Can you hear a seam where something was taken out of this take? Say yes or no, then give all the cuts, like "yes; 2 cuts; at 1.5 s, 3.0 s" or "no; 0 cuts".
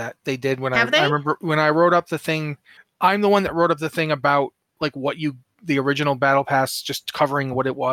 no; 0 cuts